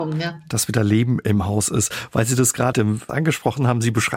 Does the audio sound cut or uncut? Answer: cut